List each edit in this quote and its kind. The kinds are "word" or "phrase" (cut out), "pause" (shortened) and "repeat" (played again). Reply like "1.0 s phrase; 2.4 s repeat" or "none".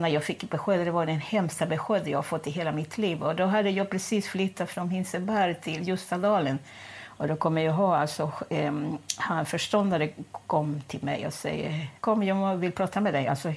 12.0 s pause